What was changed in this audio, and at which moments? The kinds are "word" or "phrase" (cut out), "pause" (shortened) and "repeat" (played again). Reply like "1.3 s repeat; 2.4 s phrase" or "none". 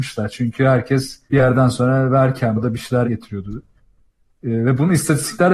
1.3 s pause; 2.6 s word; 3.0 s word